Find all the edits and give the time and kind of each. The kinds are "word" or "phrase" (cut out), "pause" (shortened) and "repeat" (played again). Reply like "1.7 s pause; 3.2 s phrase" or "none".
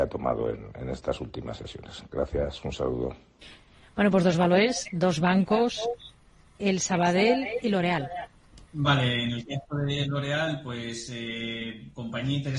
8.6 s pause